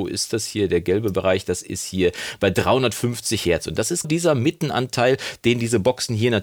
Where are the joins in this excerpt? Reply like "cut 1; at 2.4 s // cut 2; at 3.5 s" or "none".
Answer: cut 1; at 4.0 s